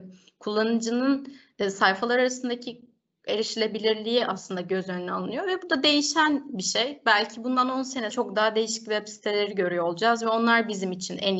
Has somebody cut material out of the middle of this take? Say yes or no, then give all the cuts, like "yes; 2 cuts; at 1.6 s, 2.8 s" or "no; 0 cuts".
yes; 1 cut; at 8.1 s